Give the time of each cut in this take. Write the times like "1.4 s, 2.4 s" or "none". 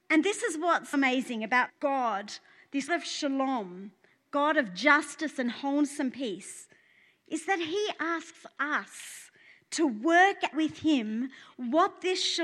0.9 s, 1.7 s, 2.9 s, 10.5 s